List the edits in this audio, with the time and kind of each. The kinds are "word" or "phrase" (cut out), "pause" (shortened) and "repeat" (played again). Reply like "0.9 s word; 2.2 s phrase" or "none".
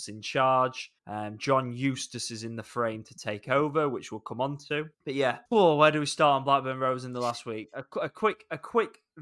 1.0 s pause; 4.9 s pause; 5.5 s pause